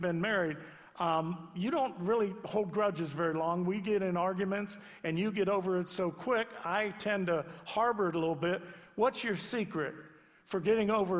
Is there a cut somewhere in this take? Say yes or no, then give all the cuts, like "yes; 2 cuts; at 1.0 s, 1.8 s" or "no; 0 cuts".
no; 0 cuts